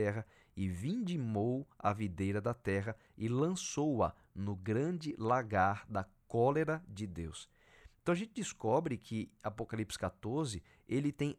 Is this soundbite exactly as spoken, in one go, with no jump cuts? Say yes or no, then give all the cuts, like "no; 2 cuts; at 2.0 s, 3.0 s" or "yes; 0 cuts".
yes; 0 cuts